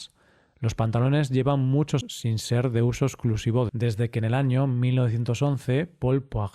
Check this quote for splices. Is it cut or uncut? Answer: cut